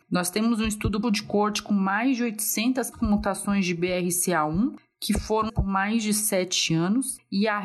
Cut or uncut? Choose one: cut